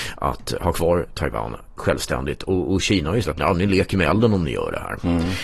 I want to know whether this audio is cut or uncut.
cut